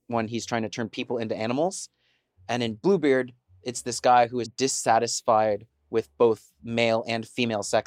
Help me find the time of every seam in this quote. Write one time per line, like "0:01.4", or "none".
0:04.4